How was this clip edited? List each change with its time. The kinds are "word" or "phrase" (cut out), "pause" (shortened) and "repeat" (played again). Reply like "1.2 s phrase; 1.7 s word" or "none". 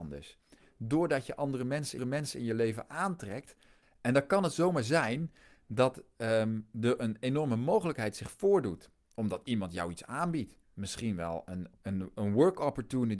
2.0 s repeat